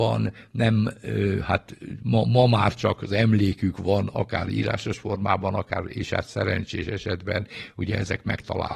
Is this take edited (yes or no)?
no